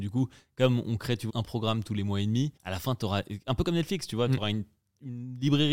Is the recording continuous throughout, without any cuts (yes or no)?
no